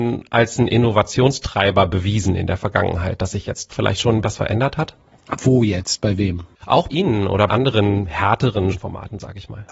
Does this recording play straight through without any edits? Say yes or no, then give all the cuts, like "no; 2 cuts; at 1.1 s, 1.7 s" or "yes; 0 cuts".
no; 5 cuts; at 3.7 s, 4.2 s, 6.9 s, 7.5 s, 8.7 s